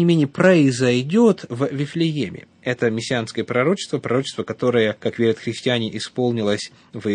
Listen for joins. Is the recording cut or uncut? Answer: uncut